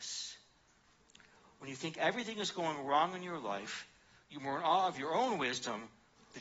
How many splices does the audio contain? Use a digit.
0